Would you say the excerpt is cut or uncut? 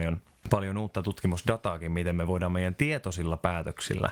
uncut